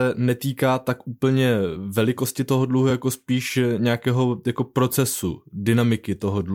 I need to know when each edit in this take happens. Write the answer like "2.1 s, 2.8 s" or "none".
none